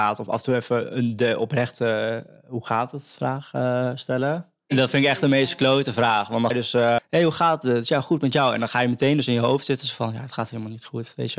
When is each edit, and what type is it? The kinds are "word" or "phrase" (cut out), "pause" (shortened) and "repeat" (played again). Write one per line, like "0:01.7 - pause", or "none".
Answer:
0:06.5 - word
0:07.0 - word

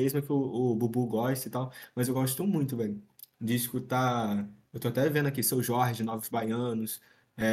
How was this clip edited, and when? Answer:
none

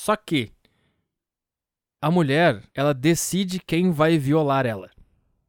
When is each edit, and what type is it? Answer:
0:02.7 - pause

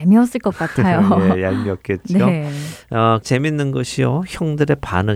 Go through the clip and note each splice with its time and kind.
0:03.2 - word

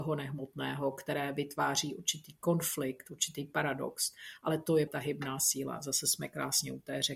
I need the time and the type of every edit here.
0:04.9 - word

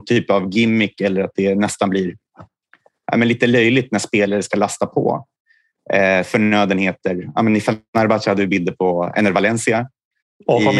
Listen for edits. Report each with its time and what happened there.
none

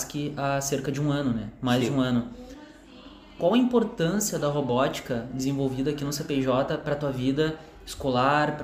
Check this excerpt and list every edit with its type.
none

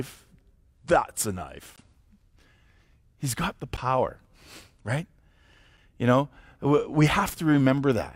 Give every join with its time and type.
none

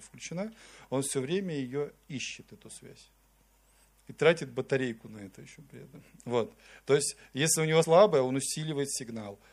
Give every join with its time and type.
0:07.8 - word

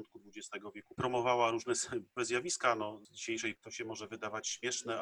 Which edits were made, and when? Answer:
0:01.0 - phrase
0:02.2 - word
0:03.6 - word

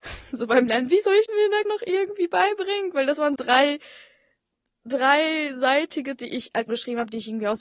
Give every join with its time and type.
0:01.3 - word
0:01.6 - word
0:03.3 - word
0:06.2 - word
0:06.7 - word

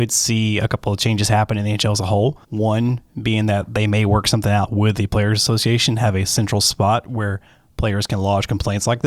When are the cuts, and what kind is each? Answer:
0:02.4 - pause

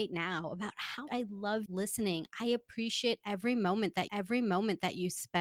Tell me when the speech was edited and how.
0:01.1 - word
0:01.7 - word
0:04.1 - repeat

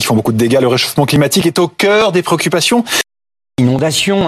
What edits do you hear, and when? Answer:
none

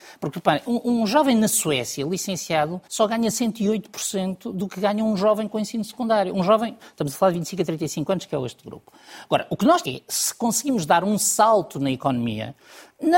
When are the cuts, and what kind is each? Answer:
0:02.8 - pause
0:09.8 - phrase

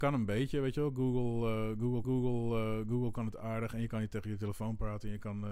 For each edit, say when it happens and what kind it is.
0:02.0 - repeat

